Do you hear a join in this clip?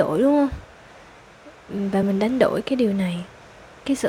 no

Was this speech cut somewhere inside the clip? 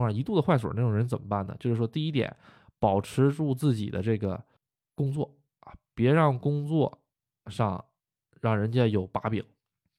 yes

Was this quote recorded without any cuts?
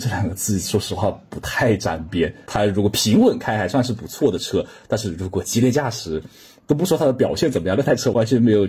yes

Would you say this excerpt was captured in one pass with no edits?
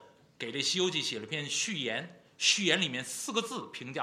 yes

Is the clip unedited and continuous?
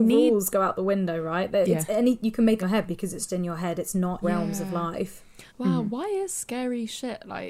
no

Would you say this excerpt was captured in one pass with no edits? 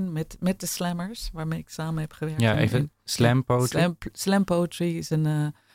yes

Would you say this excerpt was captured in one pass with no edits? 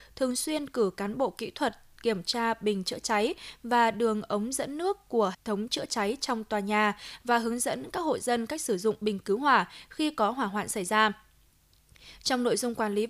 no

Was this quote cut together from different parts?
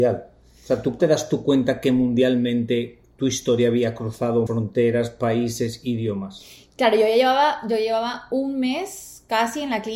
yes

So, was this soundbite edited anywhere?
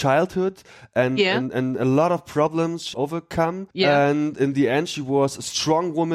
yes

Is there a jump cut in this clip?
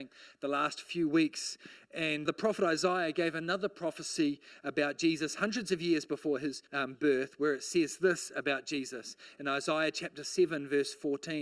yes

